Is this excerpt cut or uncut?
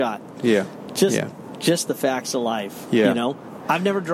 uncut